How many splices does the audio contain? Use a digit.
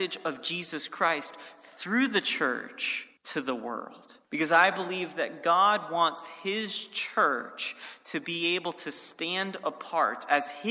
2